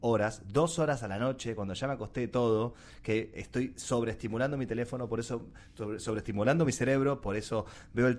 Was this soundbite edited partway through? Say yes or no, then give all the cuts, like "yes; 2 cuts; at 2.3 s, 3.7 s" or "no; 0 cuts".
no; 0 cuts